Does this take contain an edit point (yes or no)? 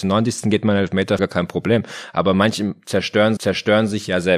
yes